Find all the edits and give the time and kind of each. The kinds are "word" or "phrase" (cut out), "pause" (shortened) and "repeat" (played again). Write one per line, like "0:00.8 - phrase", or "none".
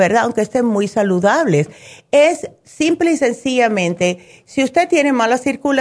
none

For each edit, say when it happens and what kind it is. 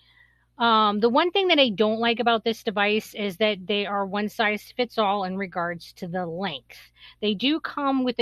none

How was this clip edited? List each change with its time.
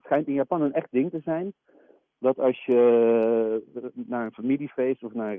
none

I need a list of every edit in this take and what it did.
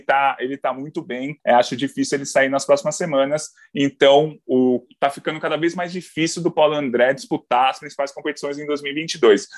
0:01.4 - pause
0:04.9 - pause

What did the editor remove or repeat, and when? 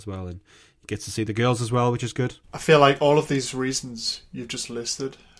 0:02.4 - pause

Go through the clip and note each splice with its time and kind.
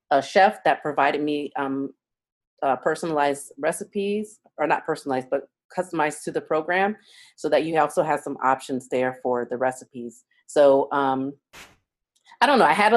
none

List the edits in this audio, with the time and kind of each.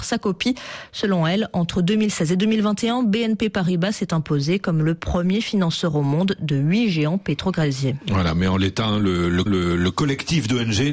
0:09.5 - repeat

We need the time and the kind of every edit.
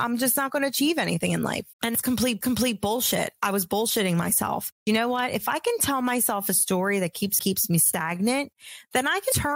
0:01.7 - pause
0:02.4 - repeat
0:04.8 - pause
0:07.4 - phrase

